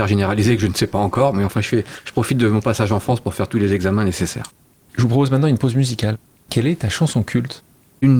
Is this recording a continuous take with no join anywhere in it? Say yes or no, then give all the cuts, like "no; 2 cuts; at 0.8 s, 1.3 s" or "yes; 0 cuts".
yes; 0 cuts